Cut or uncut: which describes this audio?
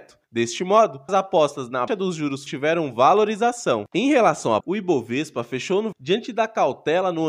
cut